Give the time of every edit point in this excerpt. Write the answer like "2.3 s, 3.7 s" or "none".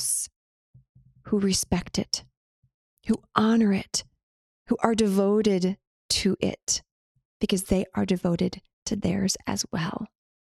none

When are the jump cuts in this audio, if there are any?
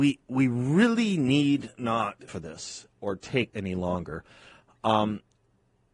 2.3 s, 3.5 s

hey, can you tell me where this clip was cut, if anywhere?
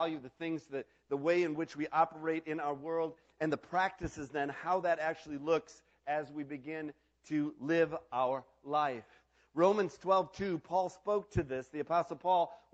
none

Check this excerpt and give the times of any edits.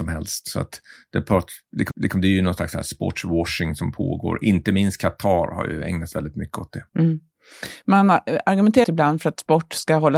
1.9 s, 6.1 s, 6.9 s, 8.8 s

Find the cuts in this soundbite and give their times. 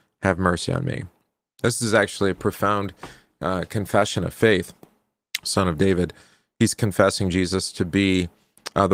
none

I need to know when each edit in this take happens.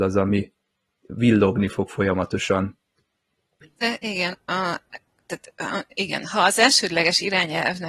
4.3 s

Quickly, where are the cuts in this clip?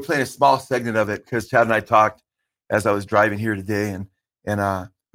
none

